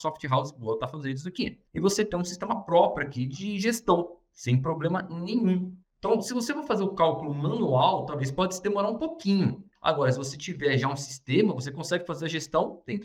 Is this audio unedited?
no; 2 cuts; at 1.7 s, 5.8 s

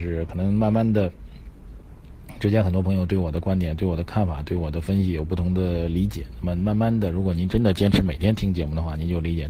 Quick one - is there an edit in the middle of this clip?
no; 0 cuts

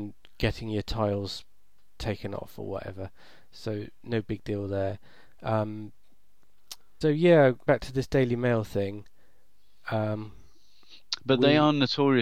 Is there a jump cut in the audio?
yes; 3 cuts; at 4.0 s, 7.0 s, 7.7 s

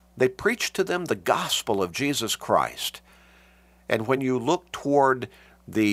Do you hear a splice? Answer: no; 0 cuts

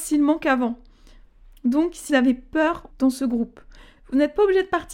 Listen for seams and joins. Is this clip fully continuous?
no; 2 cuts; at 2.1 s, 2.9 s

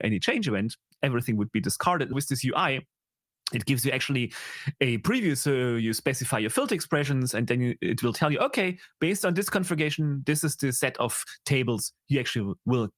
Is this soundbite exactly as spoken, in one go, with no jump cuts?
no; 1 cut; at 2.1 s

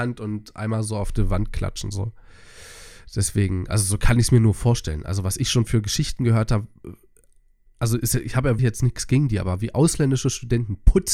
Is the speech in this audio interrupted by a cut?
yes; 1 cut; at 8.6 s

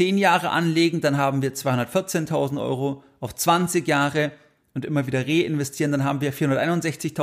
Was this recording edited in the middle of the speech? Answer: no; 0 cuts

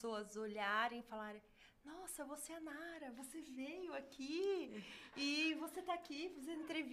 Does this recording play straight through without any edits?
yes; 0 cuts

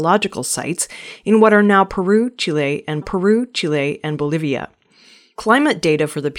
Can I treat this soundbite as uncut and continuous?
no; 1 cut; at 3.0 s

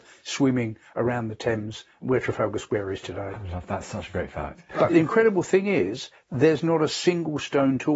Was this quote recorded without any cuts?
yes; 0 cuts

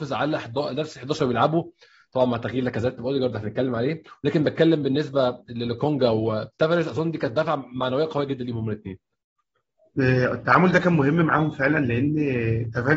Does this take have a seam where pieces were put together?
no; 0 cuts

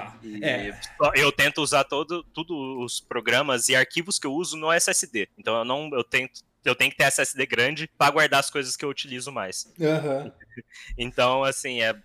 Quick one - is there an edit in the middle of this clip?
yes; 2 cuts; at 5.3 s, 7.9 s

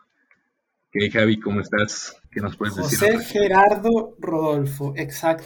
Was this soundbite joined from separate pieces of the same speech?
yes; 1 cut; at 2.2 s

